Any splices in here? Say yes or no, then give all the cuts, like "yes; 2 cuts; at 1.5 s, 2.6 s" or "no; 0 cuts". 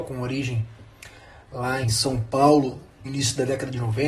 yes; 2 cuts; at 1.8 s, 3.0 s